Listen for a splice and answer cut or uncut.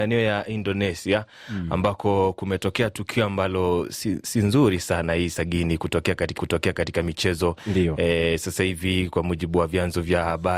cut